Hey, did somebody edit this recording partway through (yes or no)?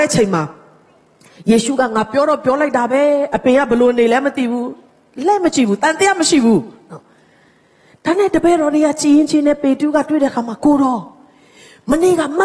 no